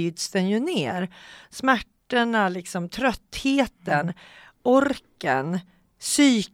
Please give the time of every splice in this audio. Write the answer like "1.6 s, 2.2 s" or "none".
none